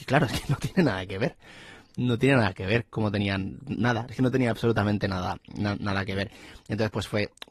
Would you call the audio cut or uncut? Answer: uncut